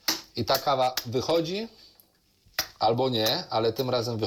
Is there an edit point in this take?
no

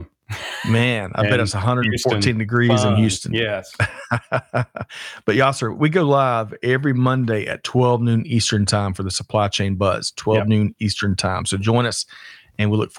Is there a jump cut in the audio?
no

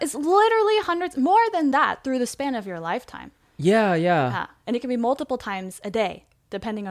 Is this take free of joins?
yes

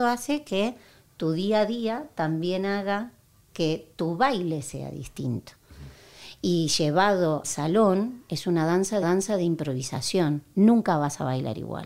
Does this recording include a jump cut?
yes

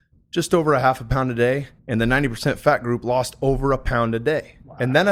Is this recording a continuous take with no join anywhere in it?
no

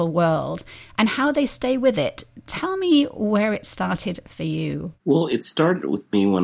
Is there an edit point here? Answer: yes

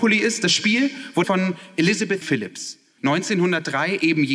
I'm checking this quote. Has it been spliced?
yes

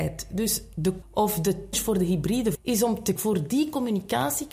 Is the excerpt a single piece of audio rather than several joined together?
no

